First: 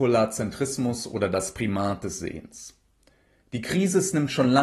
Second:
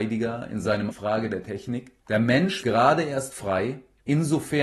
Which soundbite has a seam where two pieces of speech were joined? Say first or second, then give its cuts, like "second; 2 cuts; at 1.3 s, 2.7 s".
second; 3 cuts; at 0.9 s, 2.0 s, 2.6 s